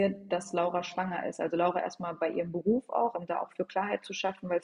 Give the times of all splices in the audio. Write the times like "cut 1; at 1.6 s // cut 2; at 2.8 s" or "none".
cut 1; at 3.1 s